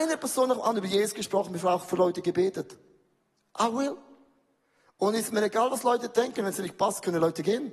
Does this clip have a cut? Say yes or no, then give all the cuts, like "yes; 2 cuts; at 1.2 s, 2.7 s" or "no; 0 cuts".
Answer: no; 0 cuts